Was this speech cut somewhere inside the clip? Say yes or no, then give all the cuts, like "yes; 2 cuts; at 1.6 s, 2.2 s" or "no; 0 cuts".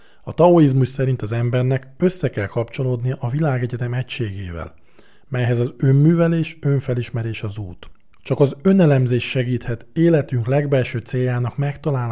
no; 0 cuts